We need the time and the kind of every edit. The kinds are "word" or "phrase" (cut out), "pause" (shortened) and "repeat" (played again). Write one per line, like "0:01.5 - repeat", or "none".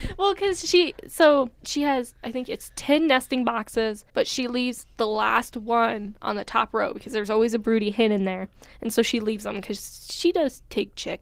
none

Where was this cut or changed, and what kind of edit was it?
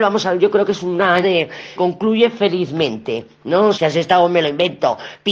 0:01.2 - word
0:01.8 - word
0:03.7 - word

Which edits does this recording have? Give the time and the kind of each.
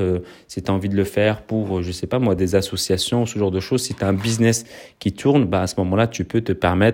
none

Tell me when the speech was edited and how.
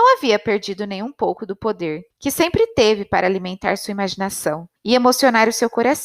0:02.1 - pause
0:04.8 - pause

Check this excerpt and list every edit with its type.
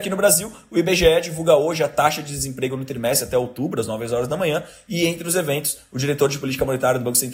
none

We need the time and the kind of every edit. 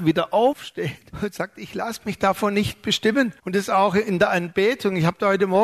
0:01.1 - pause
0:03.4 - pause

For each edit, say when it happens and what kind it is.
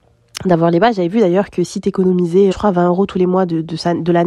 0:02.5 - word

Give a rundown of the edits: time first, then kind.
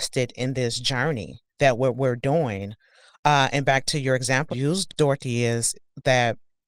0:04.5 - word
0:04.9 - word

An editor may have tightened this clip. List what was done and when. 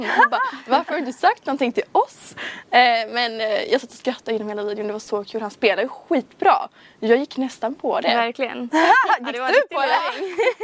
none

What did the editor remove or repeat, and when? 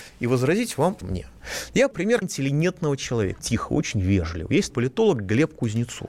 0:01.0 - word
0:01.9 - word
0:02.2 - word
0:03.4 - word
0:04.7 - word

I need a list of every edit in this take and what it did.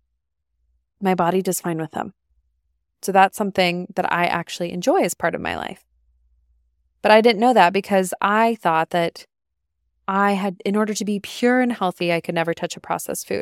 none

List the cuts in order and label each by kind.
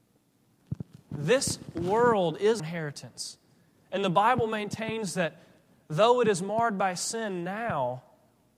0:02.6 - word

